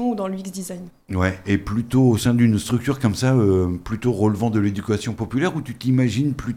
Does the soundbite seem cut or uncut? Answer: uncut